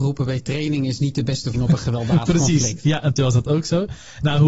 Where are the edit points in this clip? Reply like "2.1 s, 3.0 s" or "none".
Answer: 1.5 s, 3.2 s